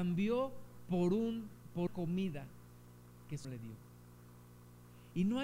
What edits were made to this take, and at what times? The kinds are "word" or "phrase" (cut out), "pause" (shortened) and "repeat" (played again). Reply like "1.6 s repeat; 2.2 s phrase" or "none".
1.9 s word; 3.4 s word